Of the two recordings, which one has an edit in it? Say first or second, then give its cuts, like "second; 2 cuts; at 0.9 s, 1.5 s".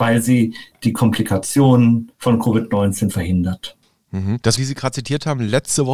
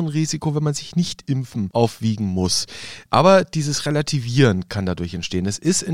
first; 2 cuts; at 2.1 s, 4.6 s